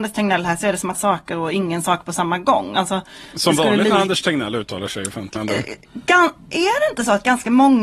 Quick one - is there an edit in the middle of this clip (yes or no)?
yes